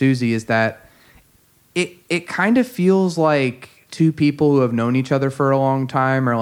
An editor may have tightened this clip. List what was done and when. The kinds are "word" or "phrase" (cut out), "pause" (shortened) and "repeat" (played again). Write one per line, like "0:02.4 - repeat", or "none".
none